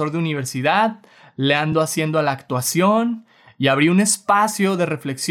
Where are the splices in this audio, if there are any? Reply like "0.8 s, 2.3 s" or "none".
none